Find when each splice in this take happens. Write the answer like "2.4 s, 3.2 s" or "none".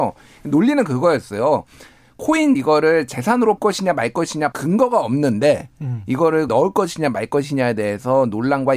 2.5 s, 3.6 s, 4.5 s, 6.5 s